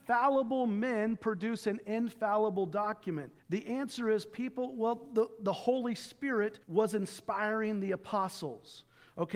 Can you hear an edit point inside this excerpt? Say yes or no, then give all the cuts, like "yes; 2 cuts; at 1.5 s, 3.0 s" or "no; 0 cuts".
yes; 2 cuts; at 3.4 s, 6.6 s